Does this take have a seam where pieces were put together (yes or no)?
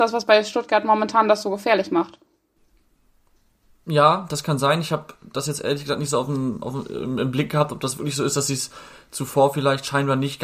no